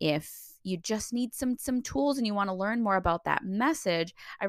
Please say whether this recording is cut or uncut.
cut